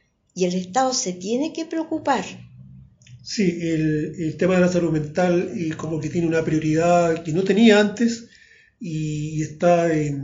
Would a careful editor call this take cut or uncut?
uncut